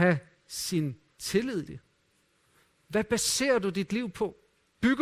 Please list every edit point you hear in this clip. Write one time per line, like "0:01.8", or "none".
0:01.7